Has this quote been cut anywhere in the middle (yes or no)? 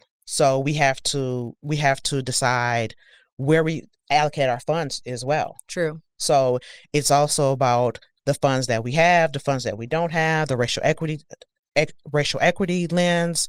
no